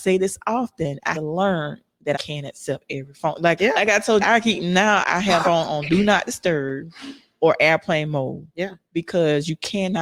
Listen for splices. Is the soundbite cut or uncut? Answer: cut